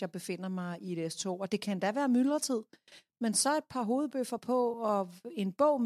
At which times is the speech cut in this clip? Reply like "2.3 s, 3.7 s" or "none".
none